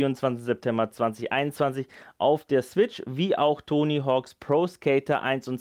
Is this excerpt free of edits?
yes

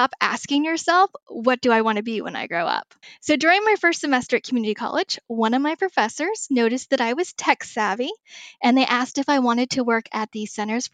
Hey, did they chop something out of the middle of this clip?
yes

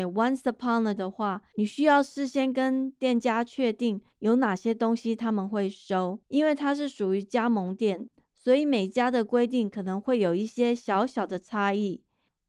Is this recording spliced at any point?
yes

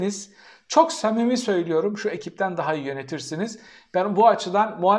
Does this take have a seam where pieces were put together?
no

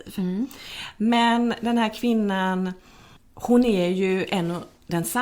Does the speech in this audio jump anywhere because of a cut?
no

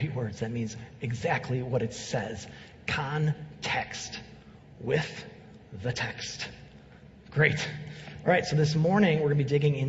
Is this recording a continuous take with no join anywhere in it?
yes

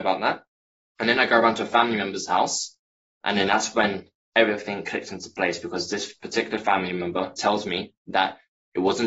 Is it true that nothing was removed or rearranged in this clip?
yes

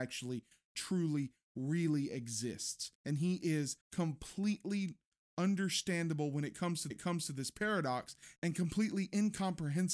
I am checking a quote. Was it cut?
yes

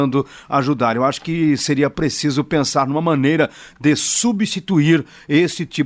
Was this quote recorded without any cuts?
yes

